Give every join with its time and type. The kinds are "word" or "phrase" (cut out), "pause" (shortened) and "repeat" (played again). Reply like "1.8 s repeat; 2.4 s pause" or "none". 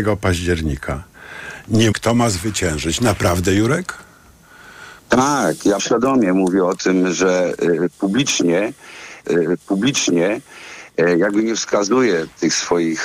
1.9 s word; 5.0 s pause; 5.8 s word; 9.2 s repeat